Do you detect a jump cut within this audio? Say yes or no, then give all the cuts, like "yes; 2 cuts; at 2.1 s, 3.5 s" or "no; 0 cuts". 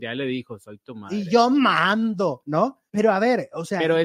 yes; 1 cut; at 2.9 s